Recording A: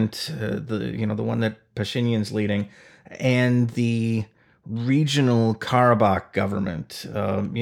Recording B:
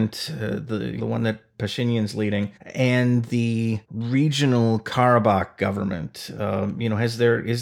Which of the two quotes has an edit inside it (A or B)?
B